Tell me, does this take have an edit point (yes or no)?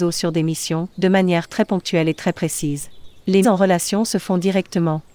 yes